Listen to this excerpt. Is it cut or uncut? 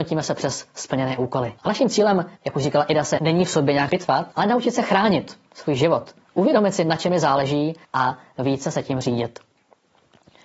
cut